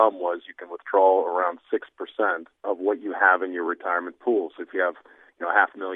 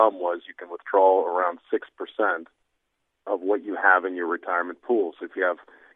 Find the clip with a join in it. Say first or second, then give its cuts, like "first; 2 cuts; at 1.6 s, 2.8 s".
first; 1 cut; at 2.6 s